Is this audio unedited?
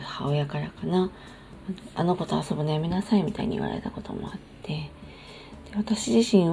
yes; 0 cuts

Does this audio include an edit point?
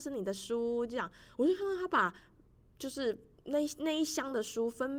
no; 0 cuts

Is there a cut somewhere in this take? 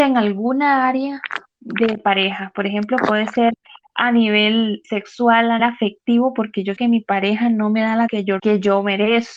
yes; 5 cuts; at 4.8 s, 5.6 s, 6.8 s, 8.1 s, 8.4 s

